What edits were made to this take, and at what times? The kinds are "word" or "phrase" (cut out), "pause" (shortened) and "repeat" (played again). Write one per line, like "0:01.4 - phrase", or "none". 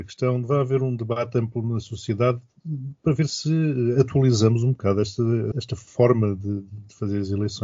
0:05.5 - word